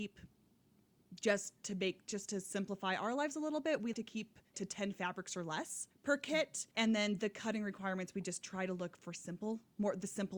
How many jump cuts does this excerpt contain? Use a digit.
4